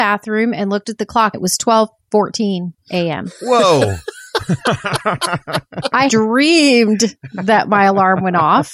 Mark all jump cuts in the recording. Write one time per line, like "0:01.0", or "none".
0:01.3
0:06.1